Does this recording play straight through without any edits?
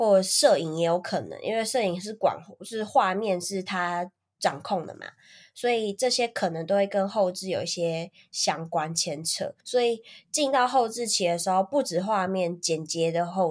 no; 1 cut; at 9.6 s

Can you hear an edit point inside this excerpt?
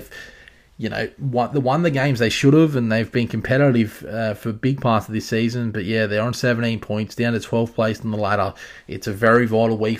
no; 0 cuts

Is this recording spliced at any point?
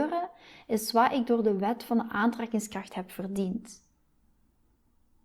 no; 0 cuts

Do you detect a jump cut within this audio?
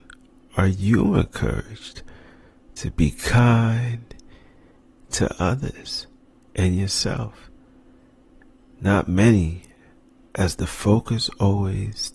no; 0 cuts

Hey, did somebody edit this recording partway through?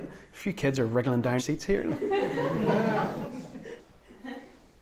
yes; 2 cuts; at 1.4 s, 3.8 s

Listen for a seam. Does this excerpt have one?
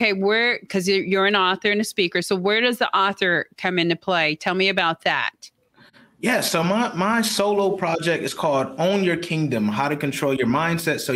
no; 0 cuts

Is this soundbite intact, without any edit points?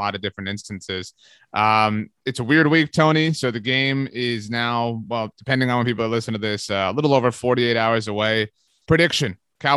yes; 0 cuts

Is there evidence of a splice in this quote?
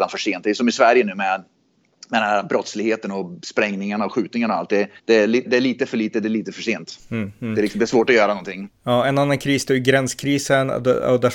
yes; 2 cuts; at 5.0 s, 5.4 s

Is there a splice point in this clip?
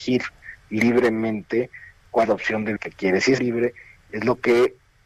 yes; 3 cuts; at 2.2 s, 2.8 s, 3.4 s

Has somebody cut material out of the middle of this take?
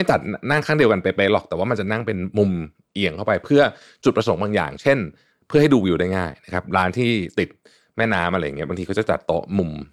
no; 0 cuts

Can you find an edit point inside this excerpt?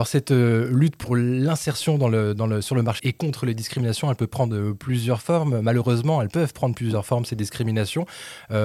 yes; 1 cut; at 3.0 s

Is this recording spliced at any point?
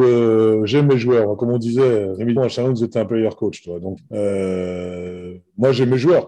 yes; 2 cuts; at 2.4 s, 4.0 s

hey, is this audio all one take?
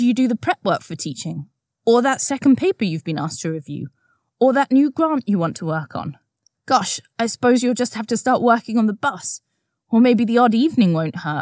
yes; 0 cuts

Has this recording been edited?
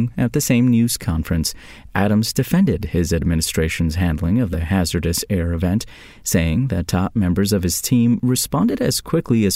no; 0 cuts

